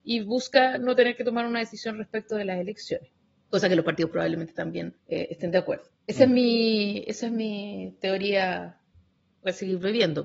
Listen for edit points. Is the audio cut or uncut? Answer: cut